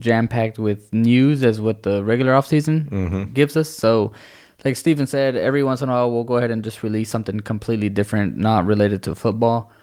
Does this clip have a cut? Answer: no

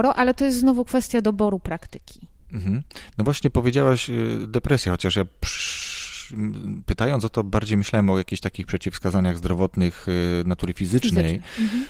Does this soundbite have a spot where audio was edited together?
no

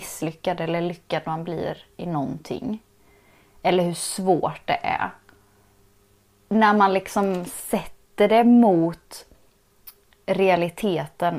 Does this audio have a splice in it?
no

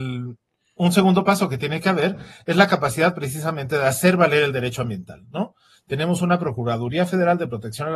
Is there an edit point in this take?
no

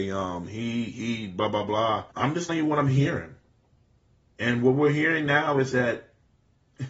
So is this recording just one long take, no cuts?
no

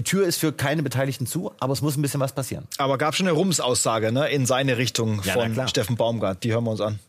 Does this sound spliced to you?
no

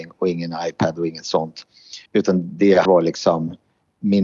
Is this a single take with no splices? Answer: no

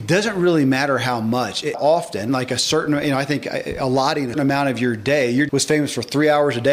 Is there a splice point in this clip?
yes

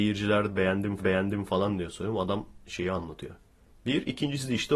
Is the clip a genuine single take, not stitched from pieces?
no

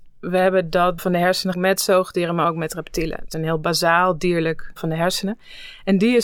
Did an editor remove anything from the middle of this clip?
yes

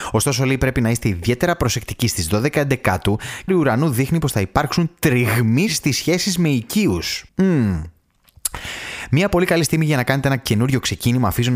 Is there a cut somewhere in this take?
yes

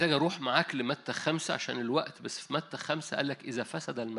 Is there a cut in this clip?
no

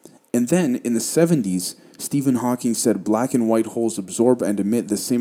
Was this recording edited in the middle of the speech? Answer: no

